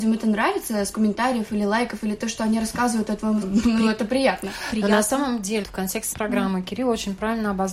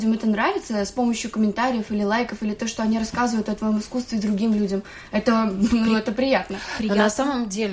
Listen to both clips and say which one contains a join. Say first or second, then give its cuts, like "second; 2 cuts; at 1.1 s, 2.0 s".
first; 4 cuts; at 0.9 s, 3.4 s, 5.6 s, 6.1 s